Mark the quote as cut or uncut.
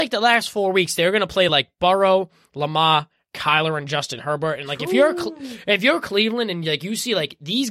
uncut